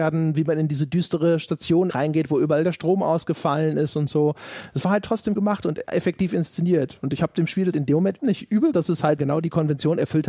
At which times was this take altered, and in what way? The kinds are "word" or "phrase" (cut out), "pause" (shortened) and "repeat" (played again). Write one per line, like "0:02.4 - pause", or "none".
0:01.9 - word
0:05.4 - word
0:07.7 - word
0:08.2 - word
0:08.7 - word
0:09.2 - word